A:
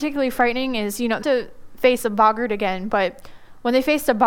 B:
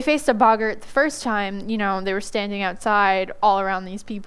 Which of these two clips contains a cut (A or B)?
A